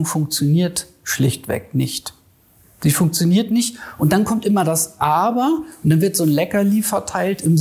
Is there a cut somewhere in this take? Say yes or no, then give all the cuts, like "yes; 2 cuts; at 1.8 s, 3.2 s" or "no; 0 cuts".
no; 0 cuts